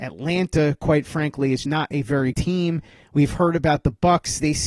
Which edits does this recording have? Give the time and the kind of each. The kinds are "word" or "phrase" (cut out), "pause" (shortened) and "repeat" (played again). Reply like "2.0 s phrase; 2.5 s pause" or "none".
1.6 s word; 2.3 s word